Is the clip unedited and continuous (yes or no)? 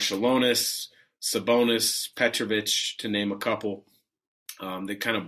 yes